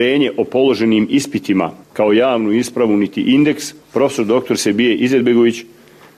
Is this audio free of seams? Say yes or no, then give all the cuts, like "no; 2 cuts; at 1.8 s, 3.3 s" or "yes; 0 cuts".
no; 2 cuts; at 1.8 s, 3.8 s